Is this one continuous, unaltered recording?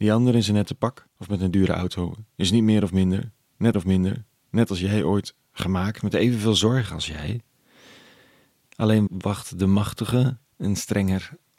no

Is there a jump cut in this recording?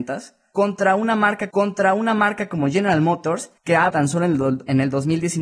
yes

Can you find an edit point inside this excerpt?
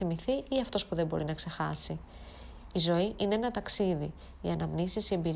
no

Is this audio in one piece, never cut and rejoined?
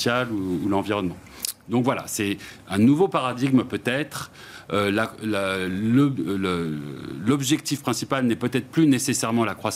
yes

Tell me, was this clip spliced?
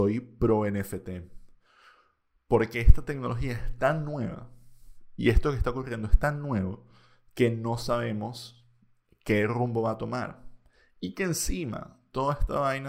no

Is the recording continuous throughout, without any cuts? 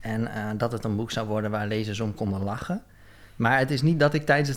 yes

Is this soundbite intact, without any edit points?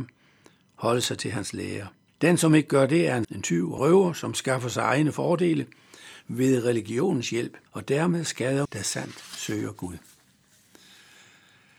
no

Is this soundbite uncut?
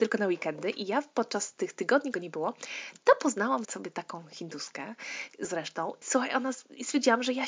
no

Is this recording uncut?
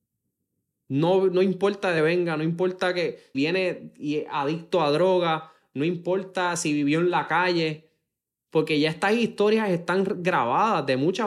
no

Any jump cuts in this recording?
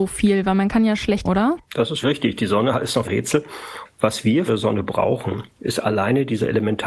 yes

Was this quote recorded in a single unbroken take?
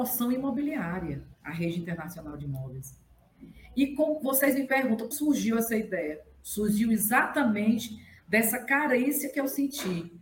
no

